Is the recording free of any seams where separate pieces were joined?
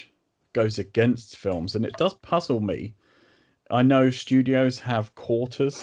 yes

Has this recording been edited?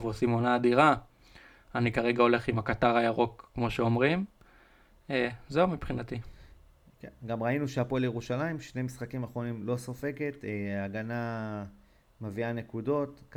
no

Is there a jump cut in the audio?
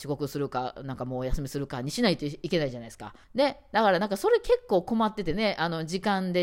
yes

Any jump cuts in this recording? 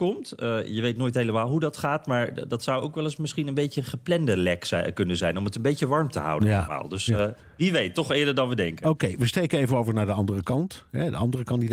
no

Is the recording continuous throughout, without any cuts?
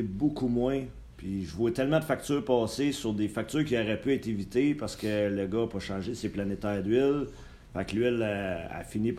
yes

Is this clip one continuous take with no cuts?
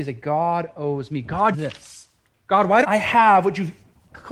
no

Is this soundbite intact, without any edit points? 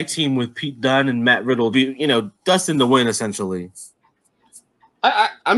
no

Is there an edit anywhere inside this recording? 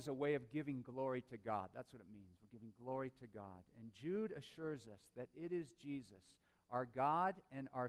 no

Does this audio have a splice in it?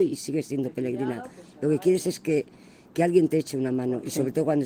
no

